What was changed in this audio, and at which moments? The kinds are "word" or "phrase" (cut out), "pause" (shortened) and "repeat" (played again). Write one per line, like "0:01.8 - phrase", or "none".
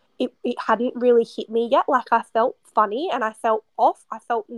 none